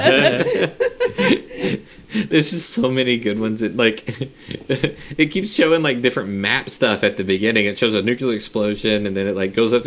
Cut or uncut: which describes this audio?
uncut